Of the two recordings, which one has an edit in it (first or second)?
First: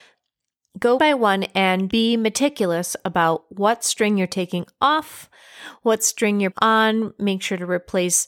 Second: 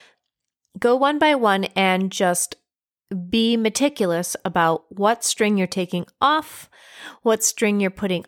first